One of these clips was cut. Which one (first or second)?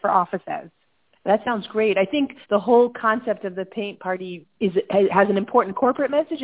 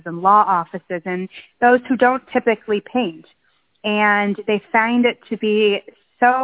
first